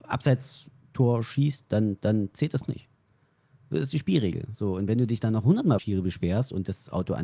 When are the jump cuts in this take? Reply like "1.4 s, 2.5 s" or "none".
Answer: 2.0 s, 2.6 s, 5.8 s